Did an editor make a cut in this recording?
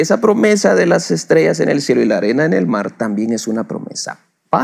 no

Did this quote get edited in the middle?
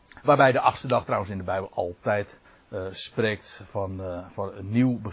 yes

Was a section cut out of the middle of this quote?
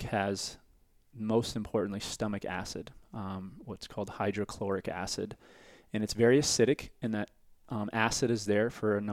no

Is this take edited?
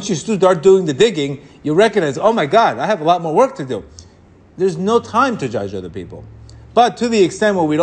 no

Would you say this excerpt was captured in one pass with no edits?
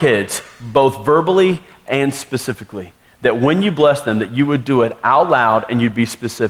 yes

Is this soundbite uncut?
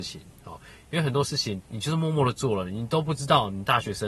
no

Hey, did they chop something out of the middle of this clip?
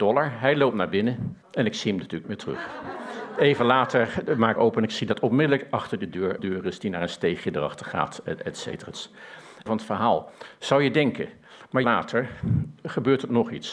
yes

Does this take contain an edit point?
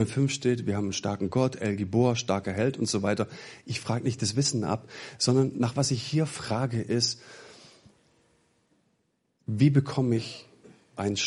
no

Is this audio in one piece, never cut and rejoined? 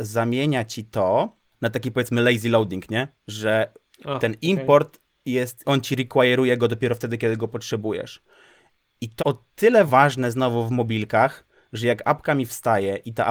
no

